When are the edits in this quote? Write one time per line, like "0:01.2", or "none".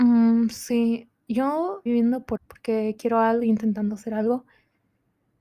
0:01.9
0:02.4
0:03.4